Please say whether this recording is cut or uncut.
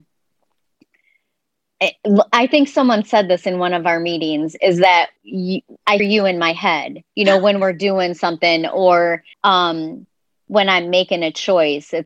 cut